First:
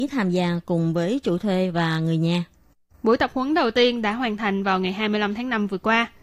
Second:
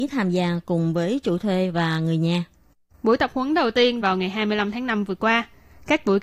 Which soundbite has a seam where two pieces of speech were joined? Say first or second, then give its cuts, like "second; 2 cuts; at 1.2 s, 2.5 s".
second; 1 cut; at 4.0 s